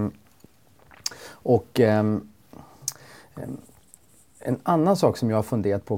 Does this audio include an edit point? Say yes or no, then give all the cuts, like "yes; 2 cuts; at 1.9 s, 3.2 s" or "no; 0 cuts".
no; 0 cuts